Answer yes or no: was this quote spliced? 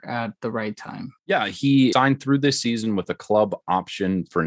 yes